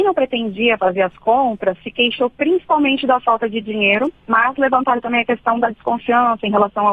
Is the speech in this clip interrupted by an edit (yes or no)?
no